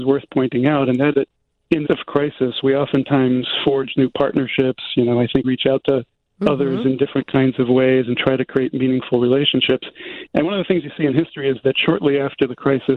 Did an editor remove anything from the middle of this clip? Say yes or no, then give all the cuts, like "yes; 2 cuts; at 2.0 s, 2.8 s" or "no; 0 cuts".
yes; 3 cuts; at 1.1 s, 1.8 s, 5.4 s